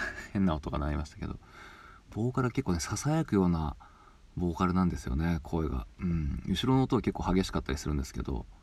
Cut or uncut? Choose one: uncut